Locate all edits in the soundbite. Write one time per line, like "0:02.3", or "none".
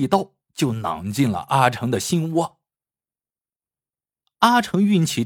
none